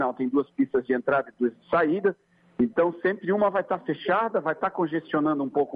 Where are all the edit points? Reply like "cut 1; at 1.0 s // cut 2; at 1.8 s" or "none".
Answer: none